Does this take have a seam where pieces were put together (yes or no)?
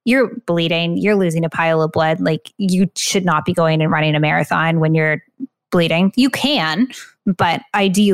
no